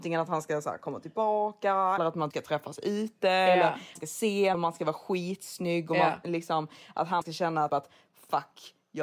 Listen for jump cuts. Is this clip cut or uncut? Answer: cut